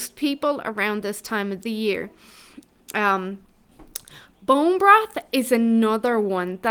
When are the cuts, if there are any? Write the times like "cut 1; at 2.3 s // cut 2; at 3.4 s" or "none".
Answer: none